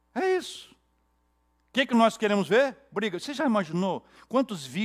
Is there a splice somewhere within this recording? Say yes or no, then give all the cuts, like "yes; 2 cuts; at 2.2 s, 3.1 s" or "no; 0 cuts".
no; 0 cuts